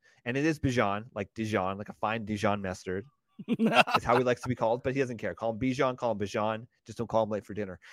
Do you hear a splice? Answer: no; 0 cuts

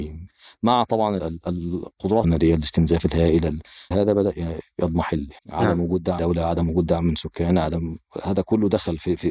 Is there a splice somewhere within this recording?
yes; 5 cuts; at 1.2 s, 2.2 s, 3.9 s, 5.4 s, 6.2 s

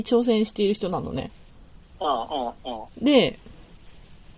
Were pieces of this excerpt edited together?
yes; 1 cut; at 2.9 s

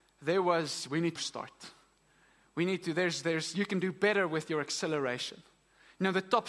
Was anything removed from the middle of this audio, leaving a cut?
yes; 1 cut; at 1.2 s

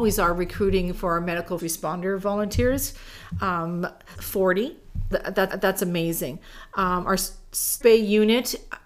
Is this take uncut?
no; 5 cuts; at 1.6 s, 4.1 s, 5.1 s, 5.5 s, 7.8 s

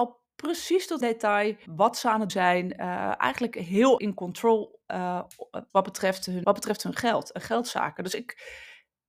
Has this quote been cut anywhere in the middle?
yes; 6 cuts; at 1.0 s, 1.7 s, 2.3 s, 4.0 s, 5.7 s, 6.4 s

